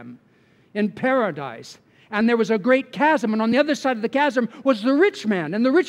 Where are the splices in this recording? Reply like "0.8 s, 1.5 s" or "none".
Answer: none